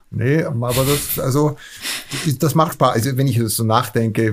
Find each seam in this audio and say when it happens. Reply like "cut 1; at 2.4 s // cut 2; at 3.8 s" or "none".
cut 1; at 2.7 s